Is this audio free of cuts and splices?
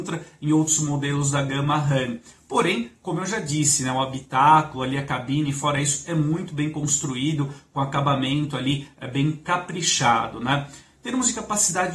yes; 0 cuts

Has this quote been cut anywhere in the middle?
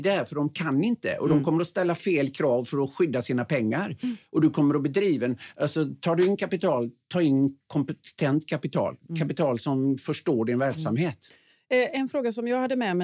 no; 0 cuts

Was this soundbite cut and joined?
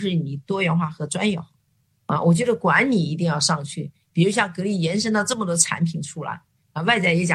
yes; 2 cuts; at 1.6 s, 4.0 s

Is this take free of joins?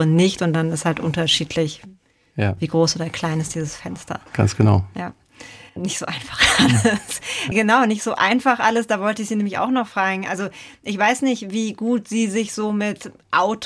yes; 0 cuts

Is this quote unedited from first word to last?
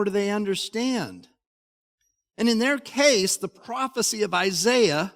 yes; 0 cuts

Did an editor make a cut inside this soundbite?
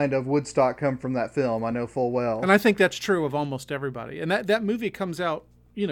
no; 0 cuts

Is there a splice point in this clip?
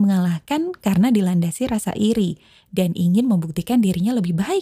no; 0 cuts

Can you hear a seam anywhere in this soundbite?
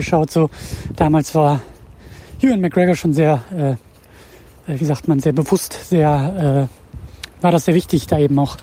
no; 0 cuts

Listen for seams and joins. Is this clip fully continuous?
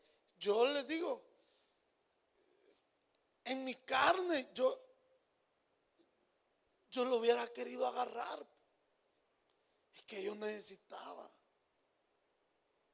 yes; 0 cuts

